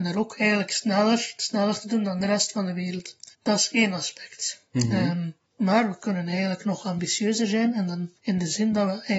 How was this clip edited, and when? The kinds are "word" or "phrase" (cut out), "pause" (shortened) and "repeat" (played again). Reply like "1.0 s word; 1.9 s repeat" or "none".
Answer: 3.3 s pause